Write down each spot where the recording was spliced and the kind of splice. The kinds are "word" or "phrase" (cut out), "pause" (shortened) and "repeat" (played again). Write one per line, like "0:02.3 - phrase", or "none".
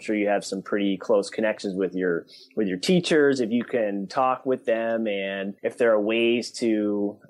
0:05.6 - pause